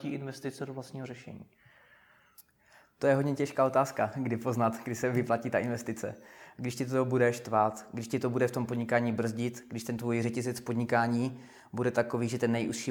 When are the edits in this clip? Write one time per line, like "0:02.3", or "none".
none